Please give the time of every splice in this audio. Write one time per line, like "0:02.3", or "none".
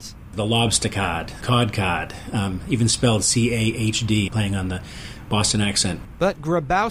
0:01.4
0:04.3